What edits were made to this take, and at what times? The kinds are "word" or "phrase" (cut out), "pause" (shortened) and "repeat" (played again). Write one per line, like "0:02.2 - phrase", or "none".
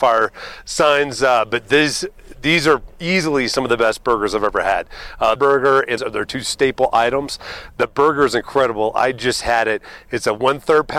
0:05.4 - phrase
0:06.0 - phrase